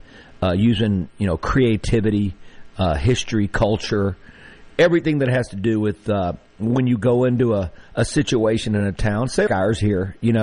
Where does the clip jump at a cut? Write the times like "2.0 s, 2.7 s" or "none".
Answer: 9.5 s

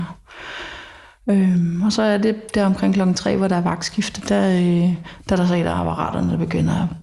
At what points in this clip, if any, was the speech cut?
none

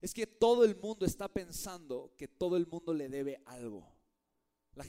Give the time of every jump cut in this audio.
none

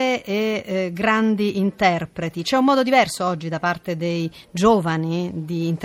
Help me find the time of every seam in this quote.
none

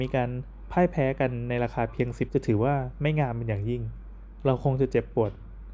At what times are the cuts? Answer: 2.3 s

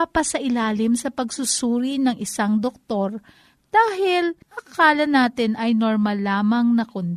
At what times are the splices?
4.4 s

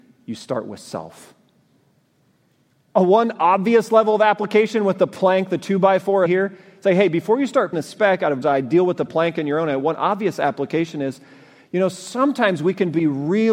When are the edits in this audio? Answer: 6.3 s, 7.7 s, 8.4 s

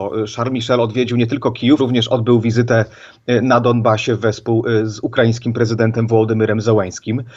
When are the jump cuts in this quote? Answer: 1.8 s

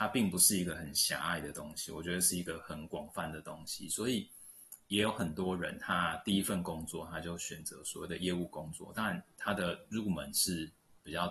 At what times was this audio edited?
9.3 s

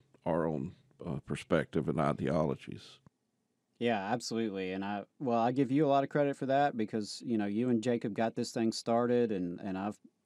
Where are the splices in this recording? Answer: none

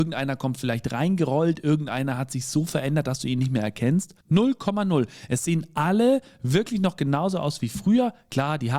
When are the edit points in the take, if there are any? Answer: 4.2 s

